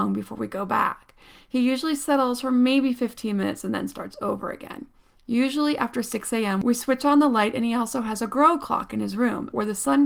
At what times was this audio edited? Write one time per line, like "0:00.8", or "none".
none